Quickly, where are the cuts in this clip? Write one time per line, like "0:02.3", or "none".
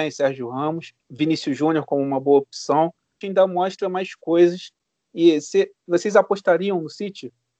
0:01.0
0:03.2